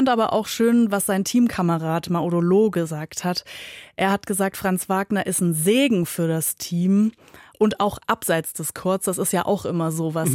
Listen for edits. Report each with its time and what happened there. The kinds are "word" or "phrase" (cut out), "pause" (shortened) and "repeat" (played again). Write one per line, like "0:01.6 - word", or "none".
none